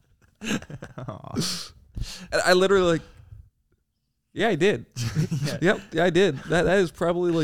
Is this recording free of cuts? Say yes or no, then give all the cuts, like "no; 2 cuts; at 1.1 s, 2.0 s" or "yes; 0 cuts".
yes; 0 cuts